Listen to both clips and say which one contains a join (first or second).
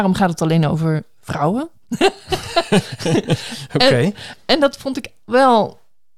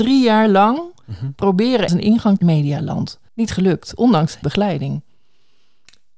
second